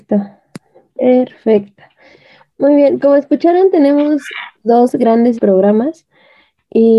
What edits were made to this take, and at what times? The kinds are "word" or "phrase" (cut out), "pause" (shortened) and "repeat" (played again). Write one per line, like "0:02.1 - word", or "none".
0:03.0 - word
0:04.5 - pause
0:05.4 - phrase